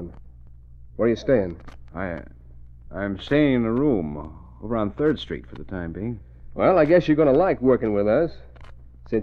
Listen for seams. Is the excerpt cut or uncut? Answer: cut